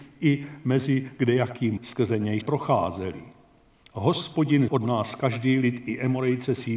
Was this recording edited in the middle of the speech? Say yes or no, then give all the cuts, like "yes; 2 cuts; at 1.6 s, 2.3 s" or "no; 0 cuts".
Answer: yes; 3 cuts; at 1.8 s, 2.4 s, 4.7 s